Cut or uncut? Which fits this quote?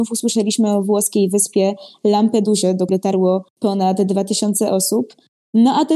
cut